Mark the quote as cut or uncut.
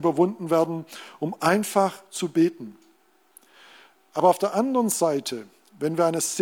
uncut